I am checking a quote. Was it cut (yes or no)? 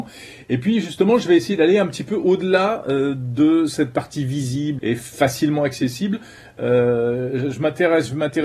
yes